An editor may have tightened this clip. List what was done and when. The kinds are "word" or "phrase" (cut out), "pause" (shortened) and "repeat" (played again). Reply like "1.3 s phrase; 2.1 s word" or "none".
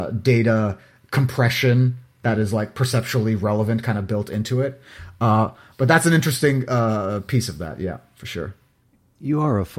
none